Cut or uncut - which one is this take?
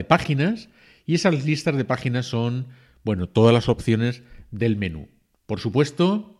uncut